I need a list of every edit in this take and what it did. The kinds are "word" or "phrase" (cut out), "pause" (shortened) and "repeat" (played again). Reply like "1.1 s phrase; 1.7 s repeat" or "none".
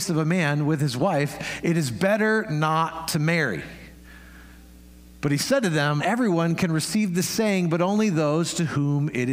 6.0 s word